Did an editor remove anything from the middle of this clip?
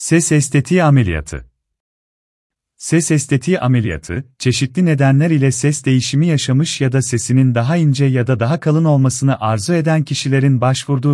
no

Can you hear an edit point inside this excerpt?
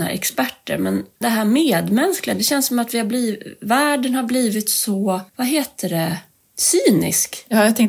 yes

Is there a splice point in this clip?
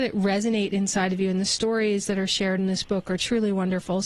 no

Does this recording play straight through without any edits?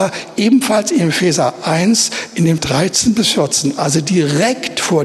no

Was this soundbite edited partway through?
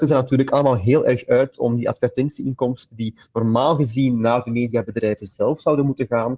no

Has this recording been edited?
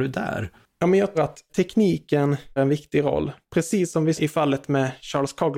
yes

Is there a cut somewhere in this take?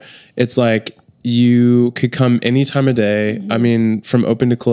no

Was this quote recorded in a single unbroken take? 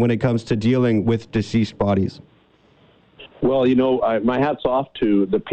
no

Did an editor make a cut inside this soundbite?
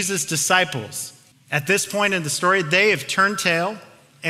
yes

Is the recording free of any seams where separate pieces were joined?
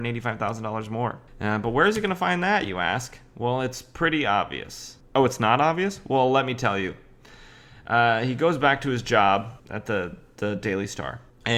no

